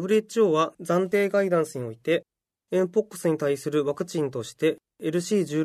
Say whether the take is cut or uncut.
uncut